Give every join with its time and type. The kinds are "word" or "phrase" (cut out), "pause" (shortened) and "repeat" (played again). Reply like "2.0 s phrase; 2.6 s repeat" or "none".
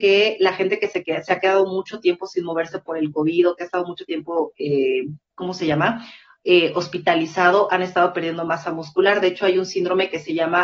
none